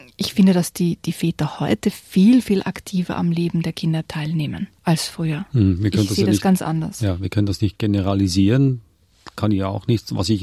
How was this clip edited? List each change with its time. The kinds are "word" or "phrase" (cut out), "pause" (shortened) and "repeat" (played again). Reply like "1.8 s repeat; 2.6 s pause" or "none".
4.8 s pause